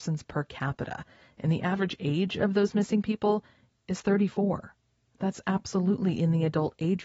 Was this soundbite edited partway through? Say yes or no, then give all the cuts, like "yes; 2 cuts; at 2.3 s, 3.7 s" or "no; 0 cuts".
no; 0 cuts